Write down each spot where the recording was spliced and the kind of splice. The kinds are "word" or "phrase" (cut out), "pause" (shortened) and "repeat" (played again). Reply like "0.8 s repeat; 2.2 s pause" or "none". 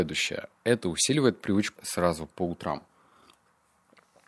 1.8 s word